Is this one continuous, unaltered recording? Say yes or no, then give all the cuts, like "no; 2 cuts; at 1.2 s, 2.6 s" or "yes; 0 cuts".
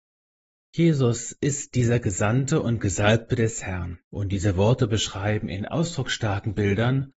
no; 1 cut; at 4.0 s